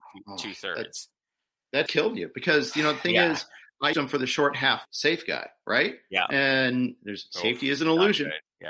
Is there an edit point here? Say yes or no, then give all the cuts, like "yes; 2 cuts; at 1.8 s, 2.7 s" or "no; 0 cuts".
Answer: yes; 3 cuts; at 1.9 s, 3.9 s, 4.8 s